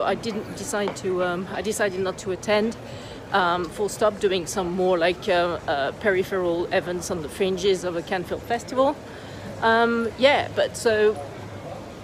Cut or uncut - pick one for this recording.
uncut